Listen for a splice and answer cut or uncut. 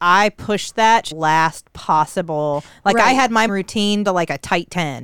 cut